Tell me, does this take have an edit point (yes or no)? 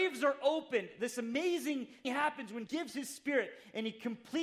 yes